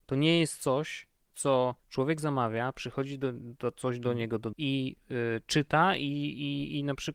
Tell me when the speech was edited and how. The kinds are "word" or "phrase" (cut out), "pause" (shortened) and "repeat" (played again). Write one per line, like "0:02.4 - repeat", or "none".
0:01.8 - pause
0:04.5 - word
0:05.0 - pause